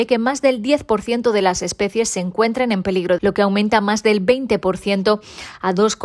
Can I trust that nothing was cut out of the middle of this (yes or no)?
no